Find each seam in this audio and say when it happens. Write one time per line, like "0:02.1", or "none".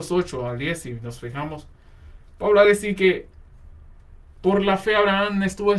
none